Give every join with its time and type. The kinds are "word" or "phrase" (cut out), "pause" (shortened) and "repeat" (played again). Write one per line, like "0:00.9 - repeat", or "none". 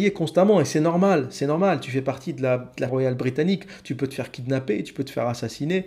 0:02.9 - word